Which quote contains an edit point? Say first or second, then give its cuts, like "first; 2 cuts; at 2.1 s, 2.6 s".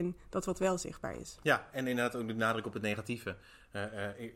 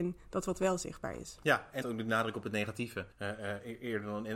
second; 2 cuts; at 1.8 s, 3.1 s